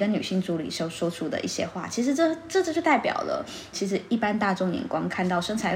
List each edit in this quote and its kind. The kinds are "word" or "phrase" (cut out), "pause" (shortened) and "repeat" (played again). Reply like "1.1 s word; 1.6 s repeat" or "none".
3.7 s word